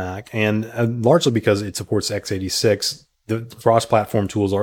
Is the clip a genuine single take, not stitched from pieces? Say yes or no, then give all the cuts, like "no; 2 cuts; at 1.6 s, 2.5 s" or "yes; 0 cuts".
yes; 0 cuts